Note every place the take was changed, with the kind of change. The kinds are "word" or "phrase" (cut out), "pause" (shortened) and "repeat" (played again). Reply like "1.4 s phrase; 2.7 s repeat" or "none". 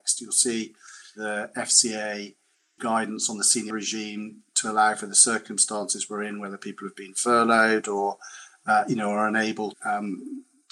2.8 s word; 3.7 s word; 9.7 s word